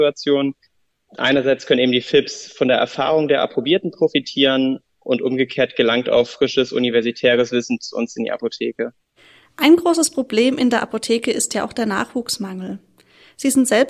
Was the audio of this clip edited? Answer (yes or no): no